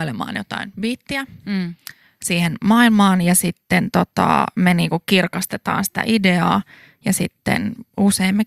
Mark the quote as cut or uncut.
uncut